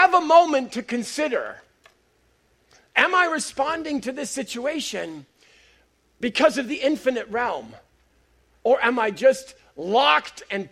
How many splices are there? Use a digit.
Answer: 0